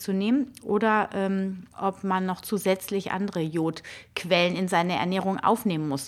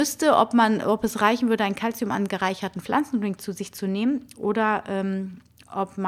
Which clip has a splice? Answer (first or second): first